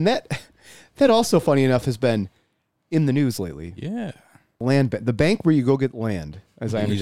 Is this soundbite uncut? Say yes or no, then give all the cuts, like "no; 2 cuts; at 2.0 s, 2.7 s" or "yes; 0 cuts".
yes; 0 cuts